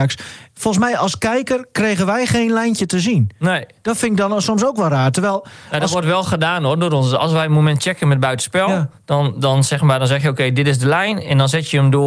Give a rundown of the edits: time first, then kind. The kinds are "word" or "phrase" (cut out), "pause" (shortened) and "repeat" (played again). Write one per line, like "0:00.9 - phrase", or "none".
none

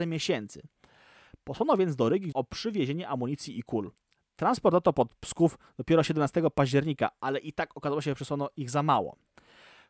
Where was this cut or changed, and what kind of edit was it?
0:02.3 - word

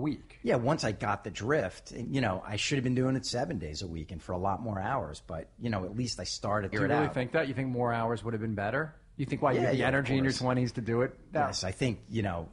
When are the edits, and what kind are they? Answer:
0:06.7 - phrase

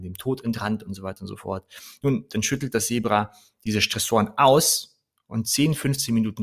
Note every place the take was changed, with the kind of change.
none

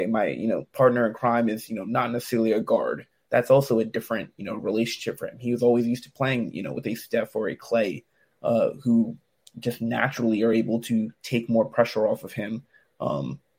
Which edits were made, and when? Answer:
none

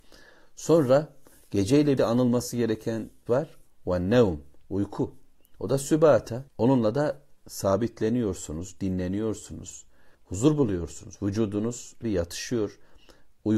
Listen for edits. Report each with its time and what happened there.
0:02.0 - word
0:03.3 - phrase
0:04.6 - pause
0:06.5 - pause
0:10.1 - pause
0:12.0 - word

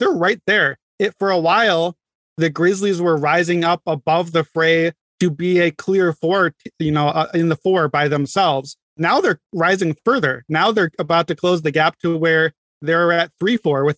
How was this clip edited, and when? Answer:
none

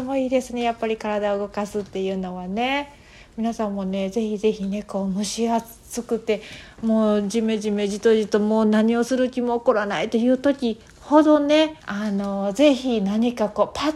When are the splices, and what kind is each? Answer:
0:11.8 - pause

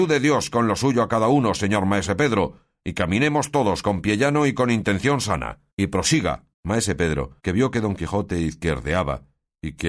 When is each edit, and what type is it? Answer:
0:05.7 - pause
0:06.5 - pause
0:07.4 - pause

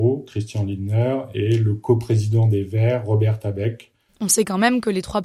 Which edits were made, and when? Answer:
none

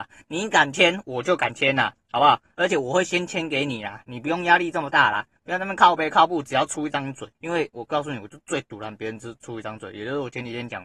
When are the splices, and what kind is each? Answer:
0:07.3 - pause

